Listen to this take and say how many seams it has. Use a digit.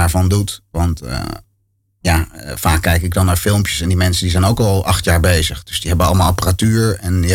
0